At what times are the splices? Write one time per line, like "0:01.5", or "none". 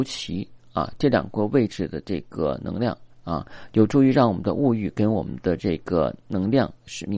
none